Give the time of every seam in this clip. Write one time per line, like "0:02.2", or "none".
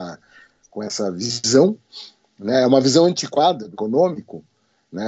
0:03.7